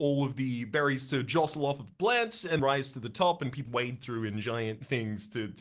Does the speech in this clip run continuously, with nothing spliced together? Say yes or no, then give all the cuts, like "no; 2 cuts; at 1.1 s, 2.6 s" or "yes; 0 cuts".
no; 2 cuts; at 2.6 s, 3.6 s